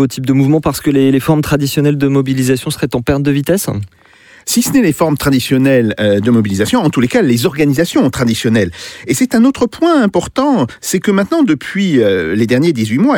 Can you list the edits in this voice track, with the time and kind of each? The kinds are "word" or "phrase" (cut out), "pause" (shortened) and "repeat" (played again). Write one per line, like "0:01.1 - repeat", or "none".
none